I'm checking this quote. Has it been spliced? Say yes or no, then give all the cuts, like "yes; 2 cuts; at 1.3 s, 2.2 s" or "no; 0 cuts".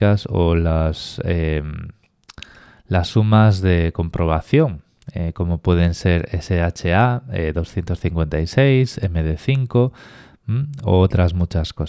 no; 0 cuts